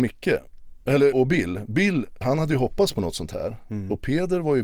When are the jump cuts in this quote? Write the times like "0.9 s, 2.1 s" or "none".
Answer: 1.1 s, 2.2 s